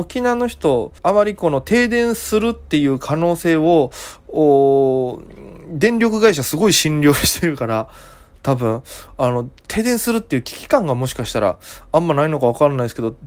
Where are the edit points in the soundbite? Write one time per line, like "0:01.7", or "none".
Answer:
0:01.0